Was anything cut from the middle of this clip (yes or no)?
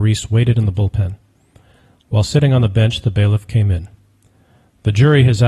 no